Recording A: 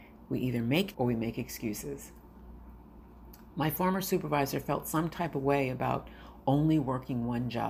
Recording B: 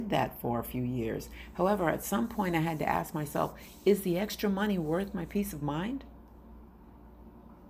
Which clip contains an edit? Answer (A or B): A